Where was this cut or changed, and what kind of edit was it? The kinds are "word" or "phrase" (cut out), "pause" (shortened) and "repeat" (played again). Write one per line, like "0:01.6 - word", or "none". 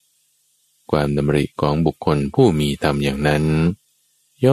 0:01.5 - pause